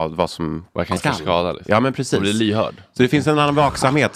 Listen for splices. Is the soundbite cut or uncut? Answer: cut